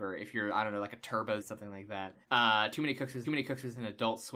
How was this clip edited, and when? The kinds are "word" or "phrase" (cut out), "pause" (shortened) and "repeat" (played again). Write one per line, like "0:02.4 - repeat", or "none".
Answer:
0:01.4 - word
0:02.2 - pause
0:03.2 - repeat